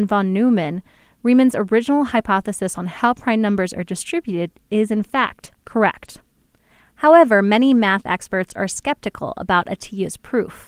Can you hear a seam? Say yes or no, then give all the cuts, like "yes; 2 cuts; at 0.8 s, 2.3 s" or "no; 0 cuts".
no; 0 cuts